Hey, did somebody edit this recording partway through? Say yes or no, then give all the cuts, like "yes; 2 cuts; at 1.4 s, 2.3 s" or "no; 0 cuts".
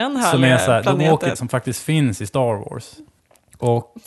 yes; 1 cut; at 1.3 s